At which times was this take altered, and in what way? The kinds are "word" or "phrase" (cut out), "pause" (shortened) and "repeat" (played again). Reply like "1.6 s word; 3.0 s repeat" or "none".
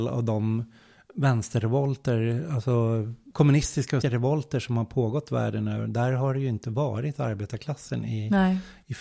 4.0 s word